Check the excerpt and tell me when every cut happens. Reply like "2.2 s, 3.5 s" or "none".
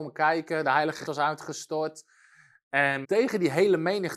1.1 s, 3.0 s